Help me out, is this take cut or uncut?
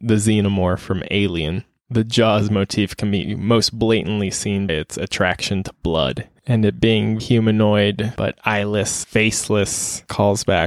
cut